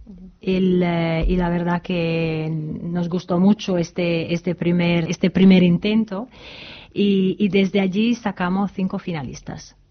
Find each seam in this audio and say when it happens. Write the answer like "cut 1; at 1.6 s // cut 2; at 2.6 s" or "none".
cut 1; at 5.1 s

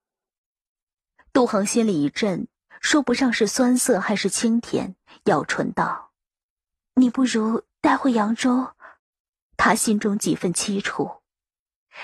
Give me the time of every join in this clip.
cut 1; at 6.1 s // cut 2; at 9.0 s

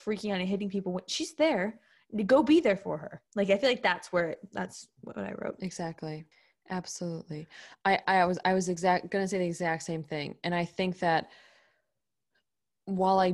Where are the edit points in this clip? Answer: cut 1; at 3.3 s // cut 2; at 6.3 s

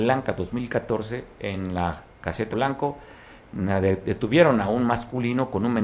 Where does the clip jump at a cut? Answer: cut 1; at 2.5 s

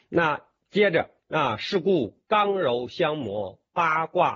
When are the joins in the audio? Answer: none

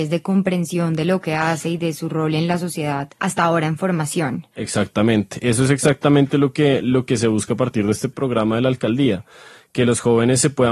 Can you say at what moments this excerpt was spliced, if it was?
cut 1; at 3.2 s // cut 2; at 4.5 s

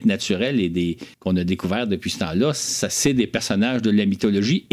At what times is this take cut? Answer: cut 1; at 1.1 s

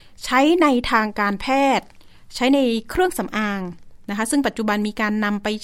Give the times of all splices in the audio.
none

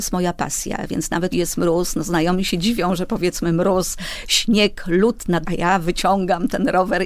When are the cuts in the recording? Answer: cut 1; at 1.3 s // cut 2; at 5.4 s

